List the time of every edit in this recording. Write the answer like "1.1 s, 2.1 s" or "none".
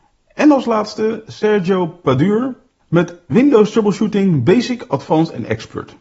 none